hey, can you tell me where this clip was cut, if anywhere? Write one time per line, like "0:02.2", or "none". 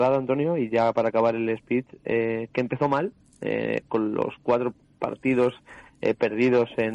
none